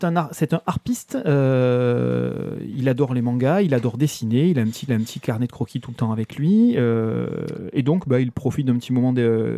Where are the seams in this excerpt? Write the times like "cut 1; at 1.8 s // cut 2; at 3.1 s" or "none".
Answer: cut 1; at 4.9 s